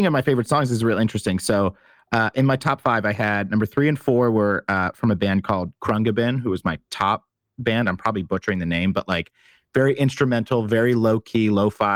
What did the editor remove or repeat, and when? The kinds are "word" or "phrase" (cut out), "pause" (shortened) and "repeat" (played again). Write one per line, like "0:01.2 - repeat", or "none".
none